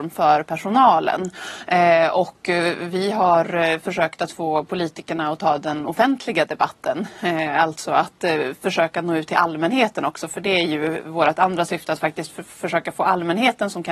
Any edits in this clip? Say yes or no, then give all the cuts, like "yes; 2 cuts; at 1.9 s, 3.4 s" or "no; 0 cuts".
no; 0 cuts